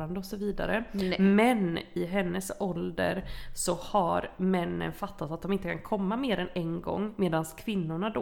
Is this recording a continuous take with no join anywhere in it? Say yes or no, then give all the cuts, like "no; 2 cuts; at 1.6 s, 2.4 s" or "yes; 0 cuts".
yes; 0 cuts